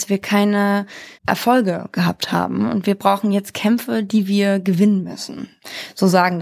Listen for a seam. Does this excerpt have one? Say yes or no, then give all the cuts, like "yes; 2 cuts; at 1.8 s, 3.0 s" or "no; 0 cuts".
yes; 1 cut; at 1.1 s